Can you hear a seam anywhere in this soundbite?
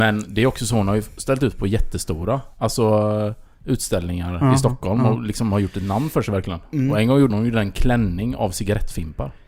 yes; 2 cuts; at 3.5 s, 7.3 s

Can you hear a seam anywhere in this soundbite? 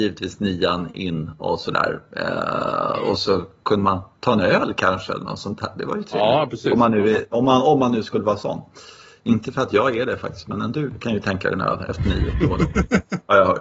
no; 0 cuts

